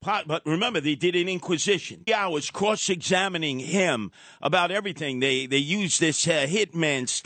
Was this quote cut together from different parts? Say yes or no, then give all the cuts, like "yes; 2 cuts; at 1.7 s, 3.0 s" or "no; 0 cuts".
yes; 1 cut; at 2.1 s